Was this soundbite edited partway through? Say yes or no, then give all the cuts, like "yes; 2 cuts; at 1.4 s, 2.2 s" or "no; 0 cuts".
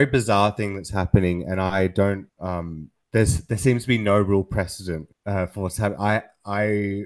no; 0 cuts